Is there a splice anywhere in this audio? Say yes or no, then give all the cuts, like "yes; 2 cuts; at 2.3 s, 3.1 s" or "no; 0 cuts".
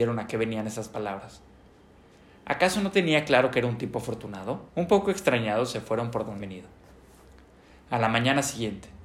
yes; 2 cuts; at 4.7 s, 6.4 s